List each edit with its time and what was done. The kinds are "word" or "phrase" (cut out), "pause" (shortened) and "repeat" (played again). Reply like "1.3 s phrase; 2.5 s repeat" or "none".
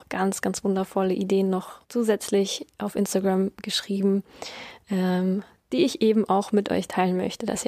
1.8 s pause